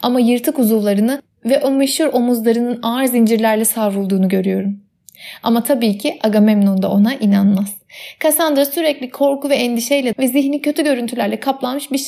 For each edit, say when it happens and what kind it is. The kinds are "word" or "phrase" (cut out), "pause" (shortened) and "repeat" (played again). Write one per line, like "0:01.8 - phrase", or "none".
0:10.1 - word